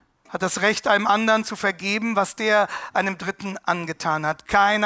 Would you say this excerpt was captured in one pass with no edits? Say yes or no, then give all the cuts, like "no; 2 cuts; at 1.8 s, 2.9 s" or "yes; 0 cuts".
yes; 0 cuts